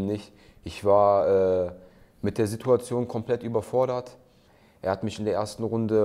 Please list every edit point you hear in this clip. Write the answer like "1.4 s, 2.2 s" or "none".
none